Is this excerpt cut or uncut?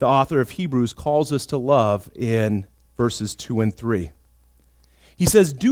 uncut